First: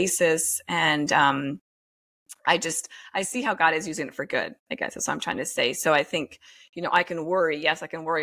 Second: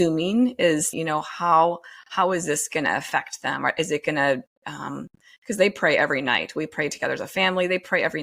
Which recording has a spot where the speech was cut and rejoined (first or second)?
second